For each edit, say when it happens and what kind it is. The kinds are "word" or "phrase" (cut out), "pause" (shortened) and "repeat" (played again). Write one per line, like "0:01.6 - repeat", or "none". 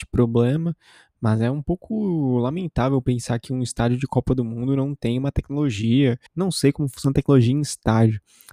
0:06.3 - pause

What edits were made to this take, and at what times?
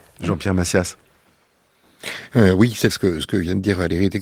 0:02.9 - word

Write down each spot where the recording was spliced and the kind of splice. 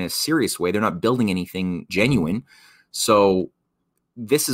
0:01.9 - word

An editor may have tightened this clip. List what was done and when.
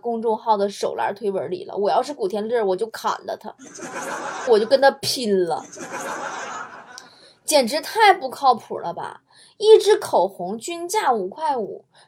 0:04.5 - phrase

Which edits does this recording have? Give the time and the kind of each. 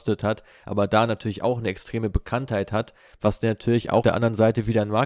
0:04.0 - word

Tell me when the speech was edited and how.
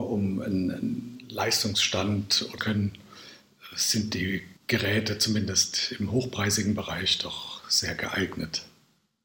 0:02.6 - phrase
0:04.6 - pause

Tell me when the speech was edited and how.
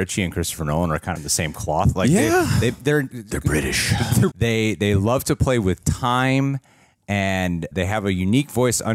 0:01.2 - phrase
0:03.1 - word
0:04.3 - phrase
0:07.7 - word

